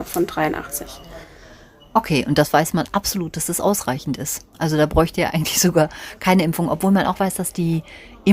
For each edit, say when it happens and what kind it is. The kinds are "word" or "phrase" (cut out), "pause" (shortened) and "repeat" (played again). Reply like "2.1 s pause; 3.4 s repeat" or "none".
none